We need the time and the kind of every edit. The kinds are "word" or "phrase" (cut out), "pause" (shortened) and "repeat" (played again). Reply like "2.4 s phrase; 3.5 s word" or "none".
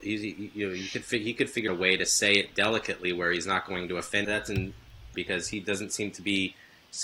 1.7 s word; 4.2 s phrase; 5.1 s word